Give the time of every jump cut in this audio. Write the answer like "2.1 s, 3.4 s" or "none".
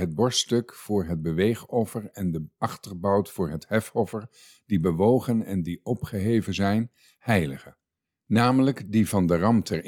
none